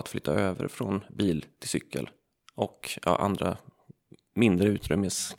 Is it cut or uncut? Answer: uncut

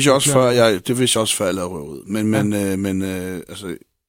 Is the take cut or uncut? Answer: uncut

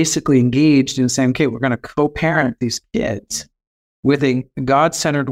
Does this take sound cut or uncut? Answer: uncut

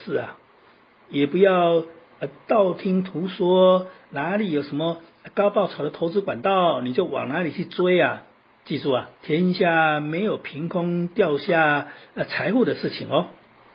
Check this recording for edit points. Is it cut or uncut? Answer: cut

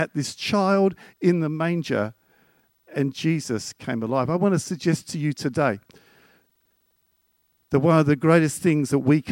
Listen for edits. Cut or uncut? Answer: uncut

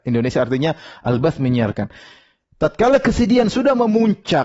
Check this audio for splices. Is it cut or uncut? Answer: uncut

